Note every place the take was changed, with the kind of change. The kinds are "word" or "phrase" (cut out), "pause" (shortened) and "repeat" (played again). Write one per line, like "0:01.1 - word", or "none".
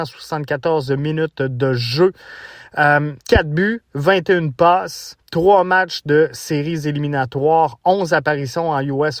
0:03.2 - pause
0:05.2 - pause